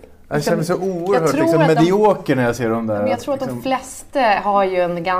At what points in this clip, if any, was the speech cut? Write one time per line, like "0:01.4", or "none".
none